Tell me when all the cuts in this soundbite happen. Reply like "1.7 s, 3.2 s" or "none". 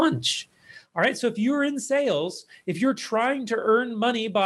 none